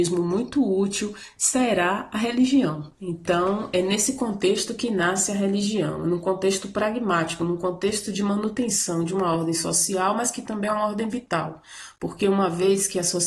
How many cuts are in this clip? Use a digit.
1